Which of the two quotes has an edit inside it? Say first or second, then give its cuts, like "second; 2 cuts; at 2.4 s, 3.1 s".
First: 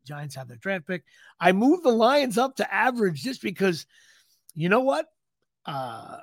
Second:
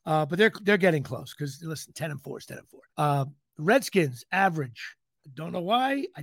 second; 1 cut; at 2.9 s